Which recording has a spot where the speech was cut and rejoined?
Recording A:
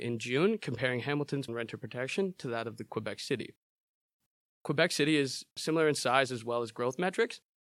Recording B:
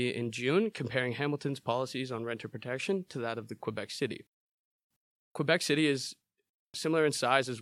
A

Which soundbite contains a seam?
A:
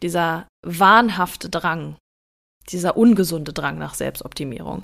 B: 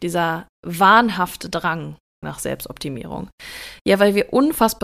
B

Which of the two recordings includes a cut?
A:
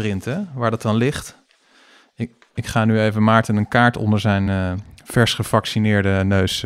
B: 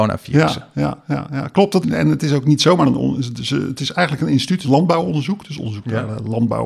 B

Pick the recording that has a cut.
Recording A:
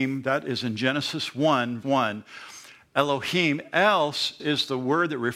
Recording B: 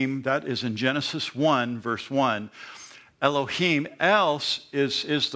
A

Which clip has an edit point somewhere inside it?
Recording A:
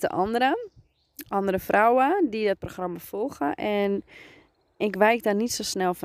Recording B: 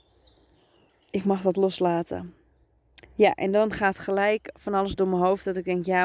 B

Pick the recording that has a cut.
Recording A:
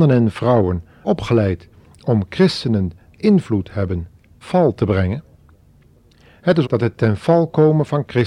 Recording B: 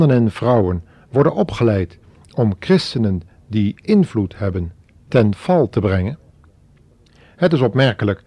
A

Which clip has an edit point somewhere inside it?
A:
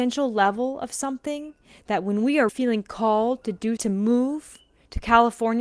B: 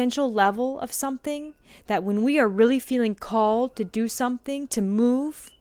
A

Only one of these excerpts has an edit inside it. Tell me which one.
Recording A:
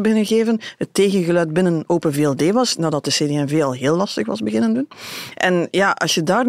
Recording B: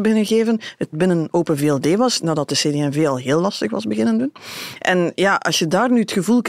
B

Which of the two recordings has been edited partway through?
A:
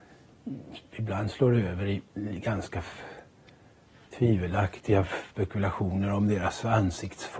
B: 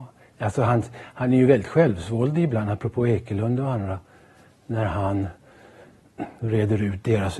A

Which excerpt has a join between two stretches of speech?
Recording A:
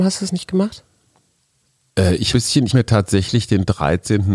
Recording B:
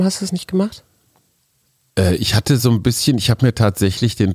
A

